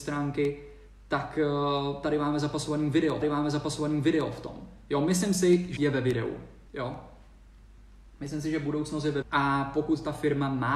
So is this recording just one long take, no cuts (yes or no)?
no